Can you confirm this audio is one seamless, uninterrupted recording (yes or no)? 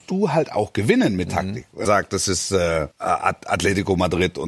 no